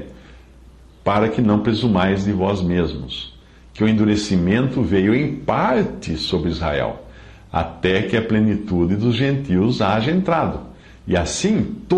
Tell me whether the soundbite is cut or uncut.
uncut